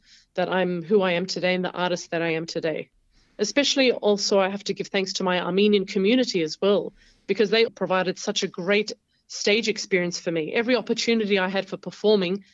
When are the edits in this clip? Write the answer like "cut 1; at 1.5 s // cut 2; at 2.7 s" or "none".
cut 1; at 7.7 s

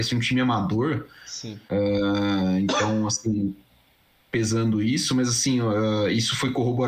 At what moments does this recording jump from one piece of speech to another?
none

